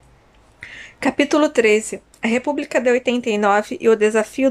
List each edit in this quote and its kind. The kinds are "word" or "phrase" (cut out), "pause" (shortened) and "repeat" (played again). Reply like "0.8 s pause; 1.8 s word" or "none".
none